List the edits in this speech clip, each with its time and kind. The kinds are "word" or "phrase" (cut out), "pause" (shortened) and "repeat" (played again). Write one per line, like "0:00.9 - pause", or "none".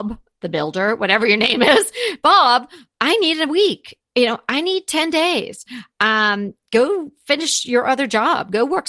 none